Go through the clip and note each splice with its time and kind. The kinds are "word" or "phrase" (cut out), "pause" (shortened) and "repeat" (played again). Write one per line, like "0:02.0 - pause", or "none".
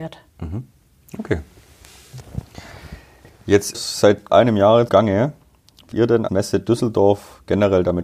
0:03.7 - phrase
0:04.3 - word
0:04.9 - word
0:05.9 - word
0:06.3 - word